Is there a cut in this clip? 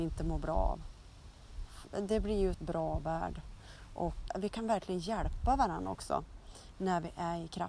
yes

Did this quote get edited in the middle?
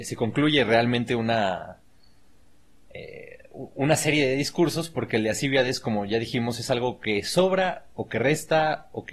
no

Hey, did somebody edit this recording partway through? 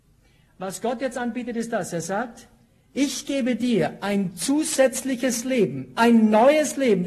no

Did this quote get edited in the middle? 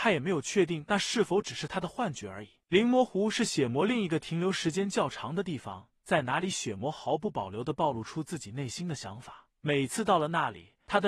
no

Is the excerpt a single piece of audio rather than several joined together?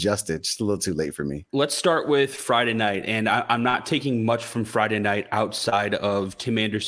no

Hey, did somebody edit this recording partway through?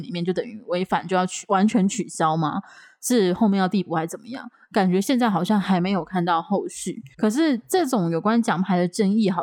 yes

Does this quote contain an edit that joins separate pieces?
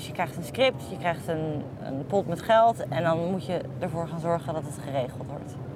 yes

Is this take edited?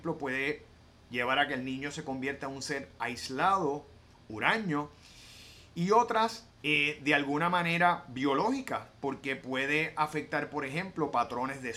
no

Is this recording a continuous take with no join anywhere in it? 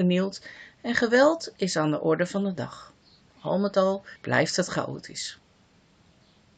no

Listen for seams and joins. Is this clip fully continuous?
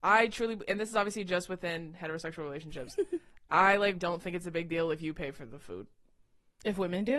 no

